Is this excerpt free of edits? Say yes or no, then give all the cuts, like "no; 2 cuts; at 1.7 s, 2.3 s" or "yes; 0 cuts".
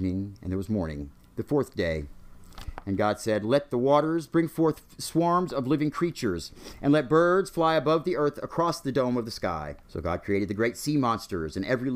no; 1 cut; at 9.8 s